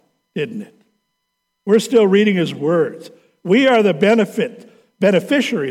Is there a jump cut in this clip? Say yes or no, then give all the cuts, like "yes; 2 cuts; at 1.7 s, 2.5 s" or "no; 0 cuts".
no; 0 cuts